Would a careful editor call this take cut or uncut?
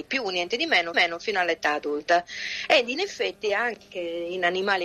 cut